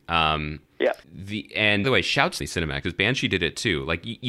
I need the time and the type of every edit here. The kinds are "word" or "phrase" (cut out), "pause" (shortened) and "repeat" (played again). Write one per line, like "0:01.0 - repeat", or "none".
0:01.0 - pause
0:01.8 - phrase
0:02.4 - phrase
0:02.8 - word